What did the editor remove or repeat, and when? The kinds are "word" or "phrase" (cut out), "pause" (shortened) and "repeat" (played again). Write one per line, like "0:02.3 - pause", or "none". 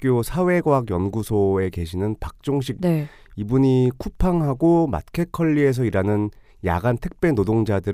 0:02.8 - word